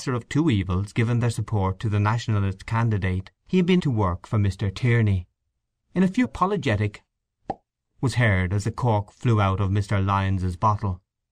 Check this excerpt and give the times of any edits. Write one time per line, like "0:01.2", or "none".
0:03.4
0:03.8
0:05.6
0:06.2